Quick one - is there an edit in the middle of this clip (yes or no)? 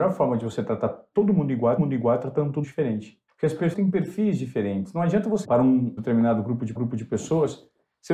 yes